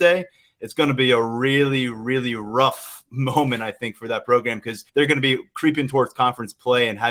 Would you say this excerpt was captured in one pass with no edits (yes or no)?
no